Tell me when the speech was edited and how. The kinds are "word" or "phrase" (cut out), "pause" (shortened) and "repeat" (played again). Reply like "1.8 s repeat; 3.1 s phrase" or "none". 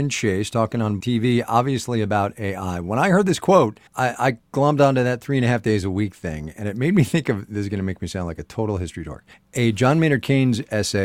1.0 s word; 3.9 s pause; 9.3 s pause